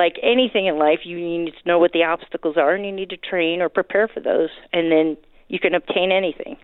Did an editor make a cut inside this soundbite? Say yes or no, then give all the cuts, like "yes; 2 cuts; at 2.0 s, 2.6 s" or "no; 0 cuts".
no; 0 cuts